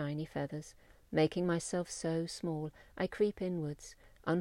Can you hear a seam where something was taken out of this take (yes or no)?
yes